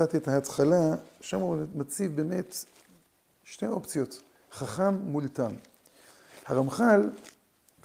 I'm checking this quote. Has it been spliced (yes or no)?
no